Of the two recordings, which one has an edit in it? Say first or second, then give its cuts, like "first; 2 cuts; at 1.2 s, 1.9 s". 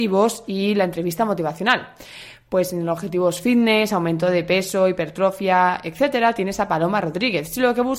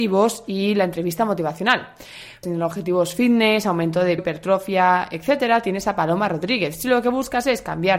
second; 2 cuts; at 2.4 s, 4.2 s